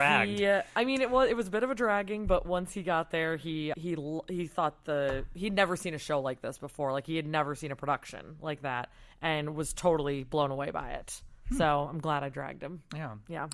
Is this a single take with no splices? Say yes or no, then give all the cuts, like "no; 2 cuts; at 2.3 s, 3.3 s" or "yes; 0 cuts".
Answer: no; 1 cut; at 3.7 s